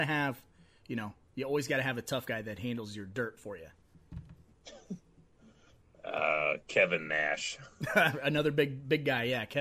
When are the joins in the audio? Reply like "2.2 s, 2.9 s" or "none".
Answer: none